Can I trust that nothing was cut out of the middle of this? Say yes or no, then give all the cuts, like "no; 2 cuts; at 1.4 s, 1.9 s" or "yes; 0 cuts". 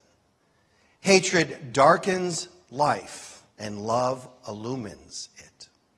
no; 1 cut; at 3.5 s